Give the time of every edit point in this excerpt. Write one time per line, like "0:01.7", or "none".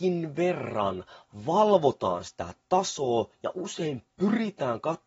none